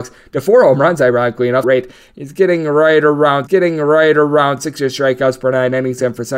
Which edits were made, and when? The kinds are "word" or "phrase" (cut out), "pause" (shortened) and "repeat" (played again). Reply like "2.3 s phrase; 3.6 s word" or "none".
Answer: 1.6 s word; 3.5 s repeat